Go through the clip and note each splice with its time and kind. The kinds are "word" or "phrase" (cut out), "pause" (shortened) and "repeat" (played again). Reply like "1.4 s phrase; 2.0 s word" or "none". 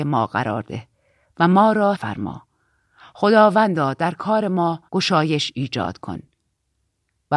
1.9 s word; 4.9 s pause

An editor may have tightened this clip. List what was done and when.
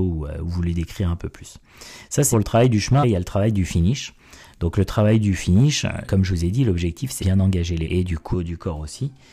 2.3 s word; 3.0 s word; 6.0 s word; 7.2 s word; 7.8 s word; 8.3 s word

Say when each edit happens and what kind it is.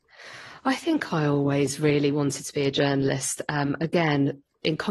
none

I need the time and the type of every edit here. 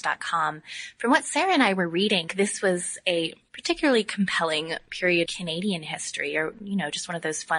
2.3 s phrase; 5.3 s word

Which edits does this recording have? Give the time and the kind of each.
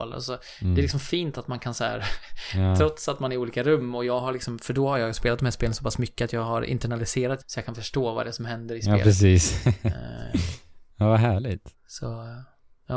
7.4 s word; 10.9 s pause

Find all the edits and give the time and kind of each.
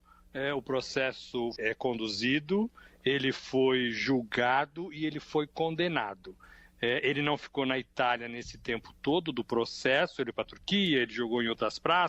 1.6 s word; 10.3 s word

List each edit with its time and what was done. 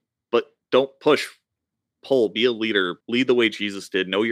3.0 s pause

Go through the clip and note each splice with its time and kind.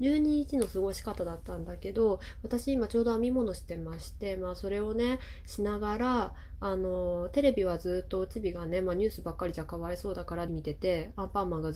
10.5 s word

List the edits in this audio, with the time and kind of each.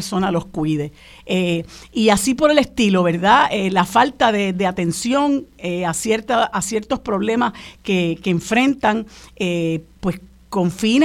none

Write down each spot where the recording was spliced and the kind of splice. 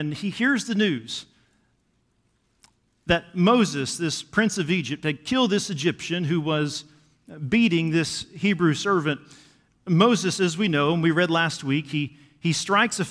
none

